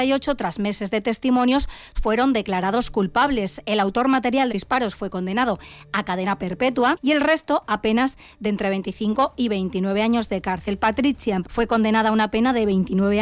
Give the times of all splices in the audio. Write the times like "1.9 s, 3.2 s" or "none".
2.0 s, 4.5 s, 11.4 s